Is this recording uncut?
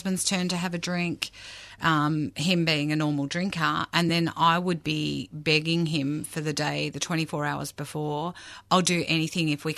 yes; 0 cuts

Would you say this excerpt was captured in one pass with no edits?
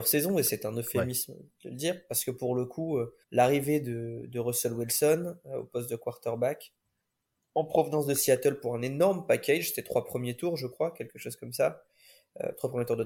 no; 1 cut; at 3.2 s

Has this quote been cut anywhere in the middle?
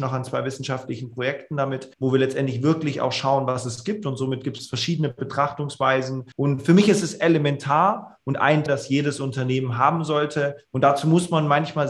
yes; 3 cuts; at 1.9 s, 6.3 s, 8.7 s

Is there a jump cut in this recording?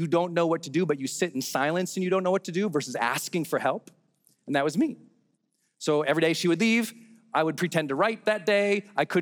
no; 0 cuts

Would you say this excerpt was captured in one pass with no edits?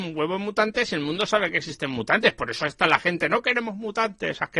yes; 0 cuts

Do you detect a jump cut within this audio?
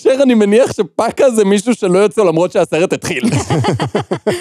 yes; 1 cut; at 2.2 s

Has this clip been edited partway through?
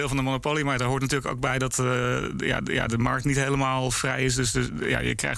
yes; 1 cut; at 2.6 s

